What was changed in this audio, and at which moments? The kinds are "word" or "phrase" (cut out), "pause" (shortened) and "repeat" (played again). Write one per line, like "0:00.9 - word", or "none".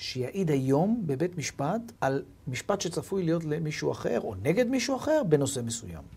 0:02.0 - pause